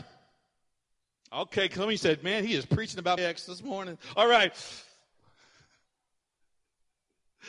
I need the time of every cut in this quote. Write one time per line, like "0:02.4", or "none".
0:03.2